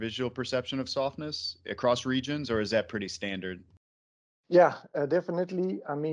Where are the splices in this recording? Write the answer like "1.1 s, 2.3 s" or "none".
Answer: none